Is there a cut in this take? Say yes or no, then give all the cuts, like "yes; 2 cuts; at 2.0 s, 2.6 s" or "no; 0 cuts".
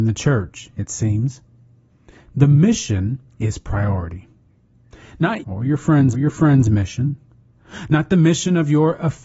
yes; 3 cuts; at 3.3 s, 5.4 s, 6.1 s